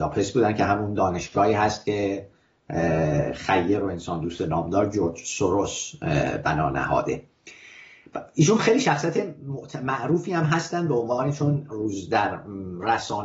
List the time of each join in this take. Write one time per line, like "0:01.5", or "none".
none